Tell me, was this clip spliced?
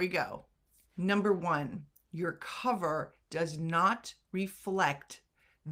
no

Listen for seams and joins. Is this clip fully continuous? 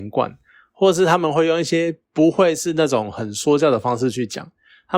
no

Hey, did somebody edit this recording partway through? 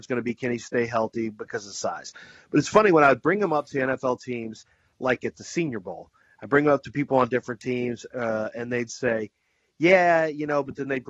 no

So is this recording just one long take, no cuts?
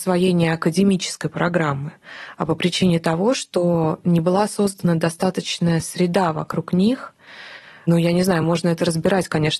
yes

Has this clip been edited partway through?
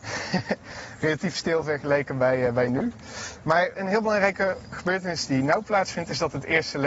yes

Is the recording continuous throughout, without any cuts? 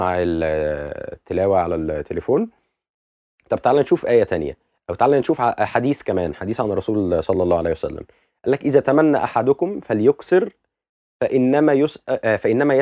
yes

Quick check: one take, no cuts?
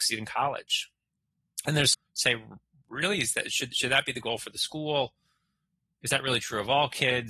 no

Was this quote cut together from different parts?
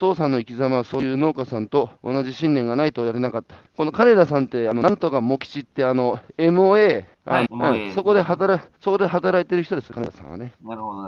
yes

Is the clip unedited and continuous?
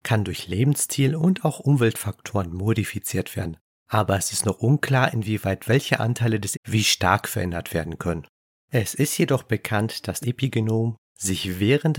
no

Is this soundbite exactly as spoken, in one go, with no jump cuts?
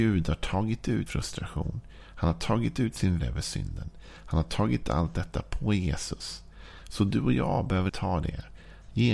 no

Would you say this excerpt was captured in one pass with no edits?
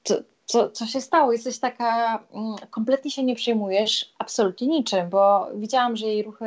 yes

